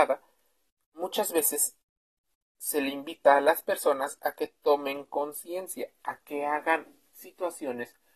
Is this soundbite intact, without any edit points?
yes; 0 cuts

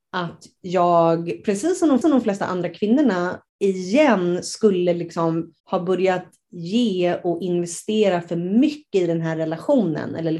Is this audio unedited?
no; 3 cuts; at 2.0 s, 3.5 s, 5.6 s

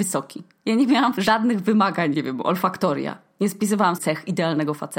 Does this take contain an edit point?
yes; 3 cuts; at 1.2 s, 2.1 s, 4.0 s

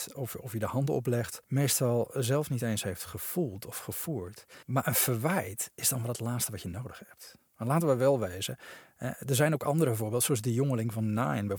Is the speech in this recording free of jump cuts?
no; 3 cuts; at 1.4 s, 4.6 s, 7.5 s

